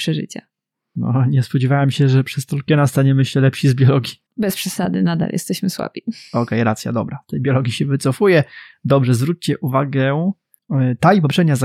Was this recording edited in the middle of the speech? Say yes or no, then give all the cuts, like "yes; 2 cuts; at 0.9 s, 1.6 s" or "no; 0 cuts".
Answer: yes; 1 cut; at 4.2 s